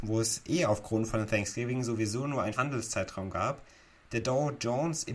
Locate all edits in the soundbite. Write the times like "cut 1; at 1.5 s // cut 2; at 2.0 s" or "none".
cut 1; at 2.5 s